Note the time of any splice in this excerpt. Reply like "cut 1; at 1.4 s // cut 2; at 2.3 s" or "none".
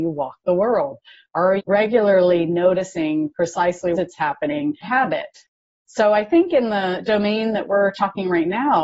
cut 1; at 1.6 s // cut 2; at 3.9 s // cut 3; at 4.8 s